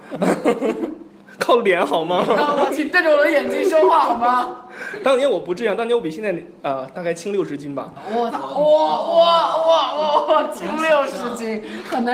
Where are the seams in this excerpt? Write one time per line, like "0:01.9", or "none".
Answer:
0:02.7
0:08.3